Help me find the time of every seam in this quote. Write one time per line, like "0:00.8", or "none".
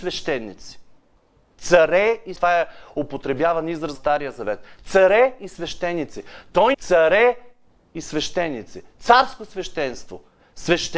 0:02.4
0:03.9
0:06.7